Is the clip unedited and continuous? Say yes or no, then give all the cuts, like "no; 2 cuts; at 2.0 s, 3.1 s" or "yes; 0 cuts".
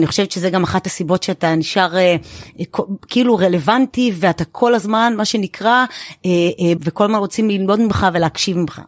no; 1 cut; at 6.8 s